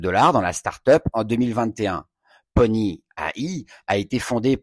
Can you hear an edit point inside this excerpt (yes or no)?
no